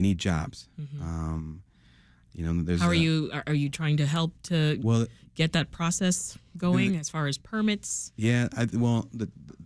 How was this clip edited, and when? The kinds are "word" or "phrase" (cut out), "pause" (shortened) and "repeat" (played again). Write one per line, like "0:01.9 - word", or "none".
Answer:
none